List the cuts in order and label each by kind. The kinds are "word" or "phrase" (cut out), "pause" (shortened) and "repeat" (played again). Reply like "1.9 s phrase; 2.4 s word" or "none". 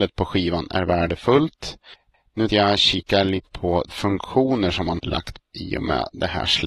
2.5 s word; 3.5 s word; 3.9 s word; 5.0 s word; 5.4 s word